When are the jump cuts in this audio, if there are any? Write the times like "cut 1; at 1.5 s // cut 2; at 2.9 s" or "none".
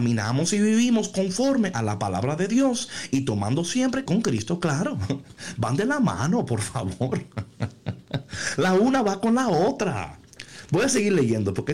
cut 1; at 4.1 s